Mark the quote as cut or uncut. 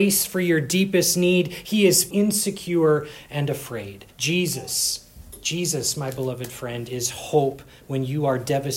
cut